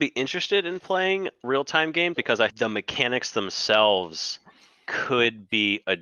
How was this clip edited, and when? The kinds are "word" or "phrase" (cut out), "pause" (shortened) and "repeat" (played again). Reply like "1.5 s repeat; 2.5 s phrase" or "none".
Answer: 1.4 s word; 2.1 s word; 2.5 s word